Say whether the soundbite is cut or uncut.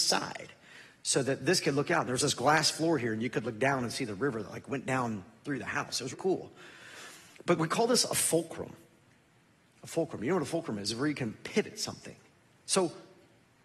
cut